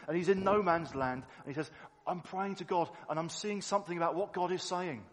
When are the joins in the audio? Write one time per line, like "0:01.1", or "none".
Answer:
none